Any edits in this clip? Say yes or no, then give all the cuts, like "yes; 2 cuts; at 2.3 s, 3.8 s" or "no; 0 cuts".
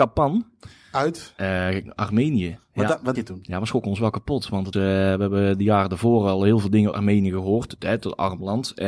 yes; 3 cuts; at 3.1 s, 4.7 s, 6.9 s